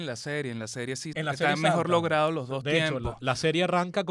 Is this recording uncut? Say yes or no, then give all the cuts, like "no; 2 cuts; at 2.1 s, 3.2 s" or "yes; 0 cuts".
no; 1 cut; at 1.1 s